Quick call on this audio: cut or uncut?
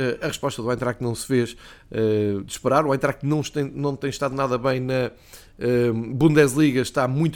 uncut